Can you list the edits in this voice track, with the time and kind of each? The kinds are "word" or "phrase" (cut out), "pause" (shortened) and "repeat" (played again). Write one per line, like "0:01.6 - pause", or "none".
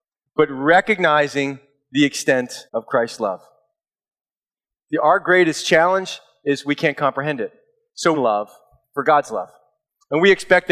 0:02.7 - pause
0:08.1 - phrase